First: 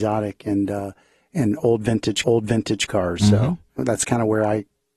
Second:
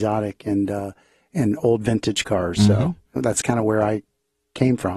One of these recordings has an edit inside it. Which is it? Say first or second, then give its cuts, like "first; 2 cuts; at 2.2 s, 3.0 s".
first; 1 cut; at 2.2 s